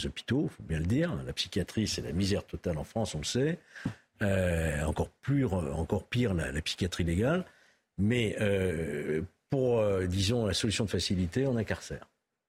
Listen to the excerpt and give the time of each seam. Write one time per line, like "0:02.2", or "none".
none